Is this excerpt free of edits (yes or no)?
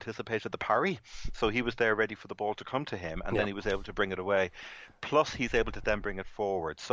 yes